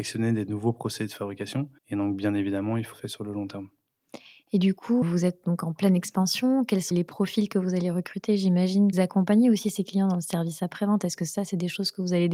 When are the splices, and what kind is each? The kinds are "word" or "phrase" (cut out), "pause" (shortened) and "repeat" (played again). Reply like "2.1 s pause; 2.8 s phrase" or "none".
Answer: 1.8 s pause; 2.9 s phrase; 5.0 s word; 6.9 s word; 8.9 s phrase